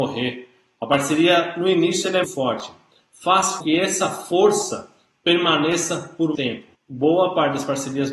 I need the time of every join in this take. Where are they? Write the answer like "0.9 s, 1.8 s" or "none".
2.2 s, 3.6 s, 6.3 s, 6.7 s